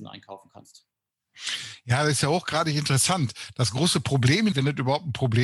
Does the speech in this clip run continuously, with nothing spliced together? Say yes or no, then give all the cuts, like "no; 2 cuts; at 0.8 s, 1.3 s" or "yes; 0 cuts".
no; 1 cut; at 4.5 s